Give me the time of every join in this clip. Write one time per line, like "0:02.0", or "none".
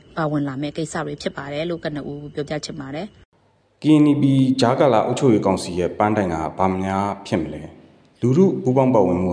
none